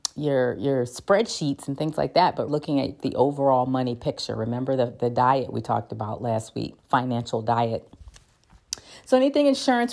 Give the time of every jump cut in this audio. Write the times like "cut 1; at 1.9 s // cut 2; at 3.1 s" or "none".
cut 1; at 2.5 s // cut 2; at 6.8 s